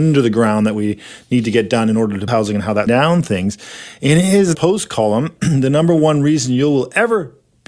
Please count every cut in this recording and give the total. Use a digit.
3